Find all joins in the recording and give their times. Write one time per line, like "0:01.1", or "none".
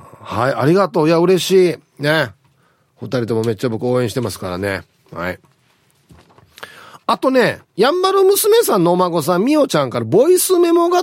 0:07.6